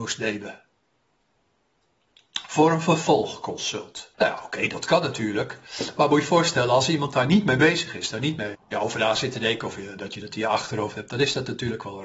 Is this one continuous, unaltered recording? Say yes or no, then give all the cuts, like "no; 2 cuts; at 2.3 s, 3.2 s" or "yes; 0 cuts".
no; 2 cuts; at 4.1 s, 8.5 s